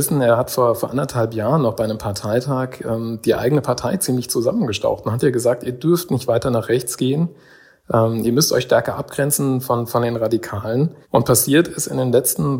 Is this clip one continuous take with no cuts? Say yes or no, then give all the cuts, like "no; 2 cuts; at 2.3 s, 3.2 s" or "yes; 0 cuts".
no; 1 cut; at 11.0 s